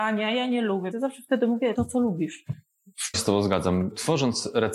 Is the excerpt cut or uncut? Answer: cut